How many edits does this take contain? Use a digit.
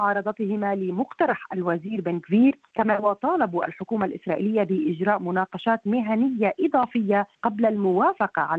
2